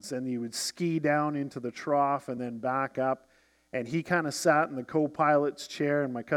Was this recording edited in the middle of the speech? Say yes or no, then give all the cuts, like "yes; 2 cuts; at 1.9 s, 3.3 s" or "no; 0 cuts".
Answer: no; 0 cuts